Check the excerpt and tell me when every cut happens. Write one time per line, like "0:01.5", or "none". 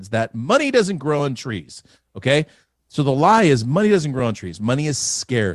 none